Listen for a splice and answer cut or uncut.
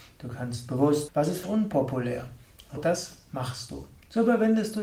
cut